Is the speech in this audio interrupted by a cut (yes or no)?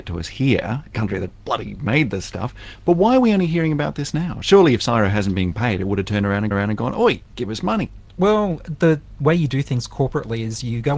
yes